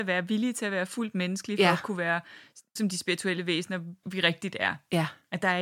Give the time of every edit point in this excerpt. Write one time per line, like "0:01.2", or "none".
0:02.8
0:04.0